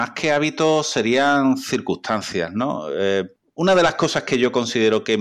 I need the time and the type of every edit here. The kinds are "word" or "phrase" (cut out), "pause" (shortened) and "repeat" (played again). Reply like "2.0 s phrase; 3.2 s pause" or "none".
none